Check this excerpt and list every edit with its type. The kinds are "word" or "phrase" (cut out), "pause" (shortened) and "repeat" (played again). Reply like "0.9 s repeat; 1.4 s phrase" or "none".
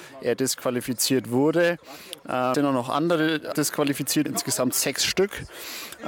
2.5 s word; 3.5 s word; 4.3 s word